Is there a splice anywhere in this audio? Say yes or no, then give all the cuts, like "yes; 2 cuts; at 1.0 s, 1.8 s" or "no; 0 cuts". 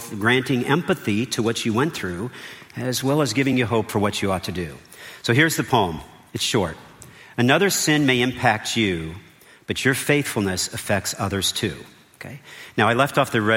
no; 0 cuts